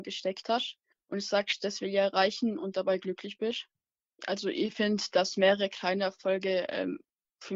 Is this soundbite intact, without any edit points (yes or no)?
yes